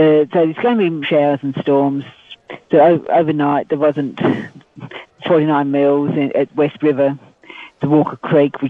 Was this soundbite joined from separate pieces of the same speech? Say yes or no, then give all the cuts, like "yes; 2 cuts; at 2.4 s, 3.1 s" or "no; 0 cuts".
yes; 3 cuts; at 1.0 s, 5.2 s, 6.8 s